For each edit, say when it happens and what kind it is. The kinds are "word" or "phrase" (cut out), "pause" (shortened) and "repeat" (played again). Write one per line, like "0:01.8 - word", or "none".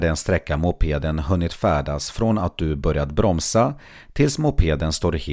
none